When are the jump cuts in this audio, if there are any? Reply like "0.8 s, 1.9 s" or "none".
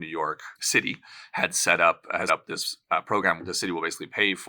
2.3 s, 3.4 s